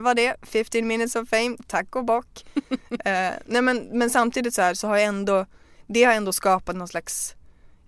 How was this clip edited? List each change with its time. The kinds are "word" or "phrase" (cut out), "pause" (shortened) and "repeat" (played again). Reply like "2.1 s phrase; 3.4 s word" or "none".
none